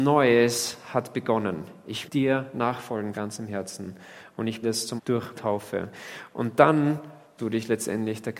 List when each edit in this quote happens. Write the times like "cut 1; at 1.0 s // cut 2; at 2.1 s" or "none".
cut 1; at 2.1 s // cut 2; at 3.1 s // cut 3; at 4.6 s // cut 4; at 5.0 s // cut 5; at 5.3 s // cut 6; at 7.4 s